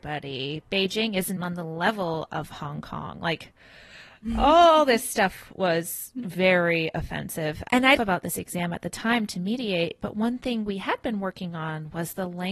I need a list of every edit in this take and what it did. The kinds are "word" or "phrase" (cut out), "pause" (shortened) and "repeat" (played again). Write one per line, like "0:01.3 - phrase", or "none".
0:01.4 - word
0:08.0 - phrase